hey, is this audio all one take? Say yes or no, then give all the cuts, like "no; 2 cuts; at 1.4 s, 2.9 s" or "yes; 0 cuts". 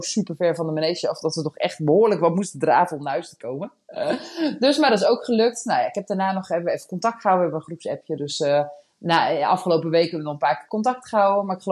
yes; 0 cuts